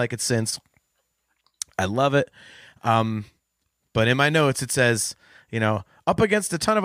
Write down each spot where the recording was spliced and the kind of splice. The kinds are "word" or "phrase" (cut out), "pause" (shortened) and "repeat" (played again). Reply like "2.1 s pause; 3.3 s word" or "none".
none